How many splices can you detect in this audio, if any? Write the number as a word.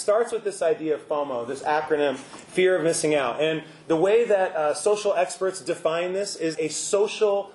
one